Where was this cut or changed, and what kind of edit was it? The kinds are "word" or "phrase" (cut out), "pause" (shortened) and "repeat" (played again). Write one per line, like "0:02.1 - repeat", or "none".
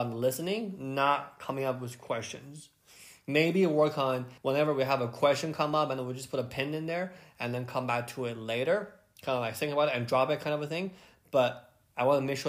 0:04.4 - pause